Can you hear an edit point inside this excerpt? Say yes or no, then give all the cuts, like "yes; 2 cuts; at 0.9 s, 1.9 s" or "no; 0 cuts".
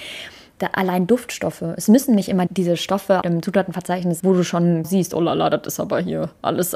yes; 4 cuts; at 2.5 s, 3.2 s, 4.2 s, 4.8 s